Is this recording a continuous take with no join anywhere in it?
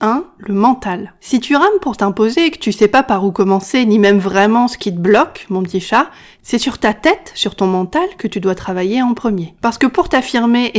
yes; 0 cuts

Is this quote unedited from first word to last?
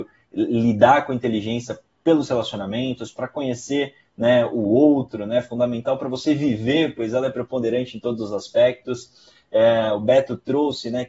yes; 0 cuts

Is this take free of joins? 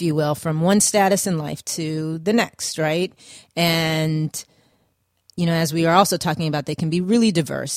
yes; 0 cuts

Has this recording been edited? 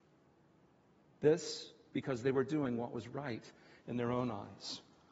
no; 0 cuts

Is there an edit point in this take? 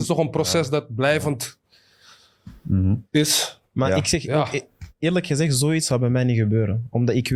no; 0 cuts

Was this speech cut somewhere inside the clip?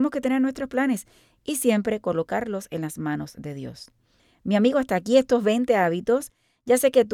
no; 0 cuts

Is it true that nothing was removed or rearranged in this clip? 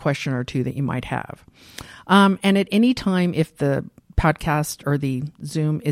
yes; 0 cuts

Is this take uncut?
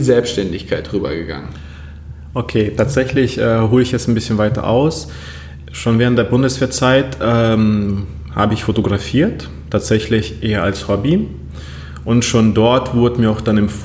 yes; 0 cuts

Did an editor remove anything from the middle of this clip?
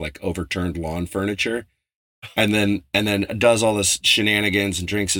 no; 0 cuts

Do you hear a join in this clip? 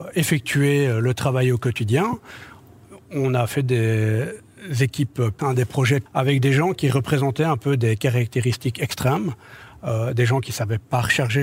yes; 2 cuts; at 5.4 s, 6.1 s

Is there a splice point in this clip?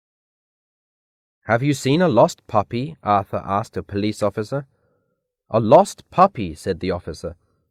no; 0 cuts

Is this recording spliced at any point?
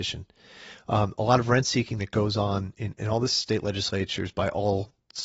no; 0 cuts

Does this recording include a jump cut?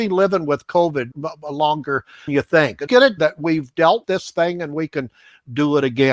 yes; 5 cuts; at 1.1 s, 2.3 s, 2.9 s, 3.2 s, 4.0 s

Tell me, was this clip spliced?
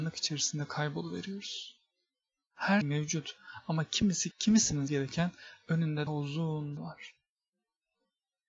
yes; 5 cuts; at 2.8 s, 4.3 s, 4.9 s, 6.1 s, 6.8 s

